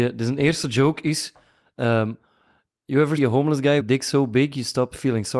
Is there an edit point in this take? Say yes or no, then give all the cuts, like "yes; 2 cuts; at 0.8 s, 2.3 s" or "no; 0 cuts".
yes; 2 cuts; at 3.2 s, 3.8 s